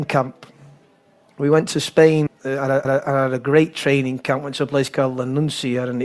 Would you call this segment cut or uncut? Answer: cut